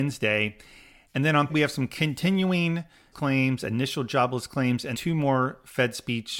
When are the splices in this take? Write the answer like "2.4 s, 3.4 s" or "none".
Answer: 1.5 s, 3.1 s, 4.9 s